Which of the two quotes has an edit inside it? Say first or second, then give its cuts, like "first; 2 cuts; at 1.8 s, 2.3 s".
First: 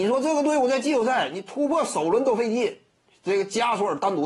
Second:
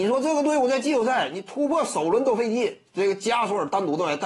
second; 1 cut; at 2.9 s